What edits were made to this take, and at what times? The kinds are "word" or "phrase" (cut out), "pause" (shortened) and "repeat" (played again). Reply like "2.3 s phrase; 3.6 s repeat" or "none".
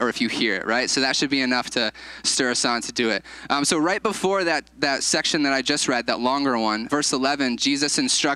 6.9 s word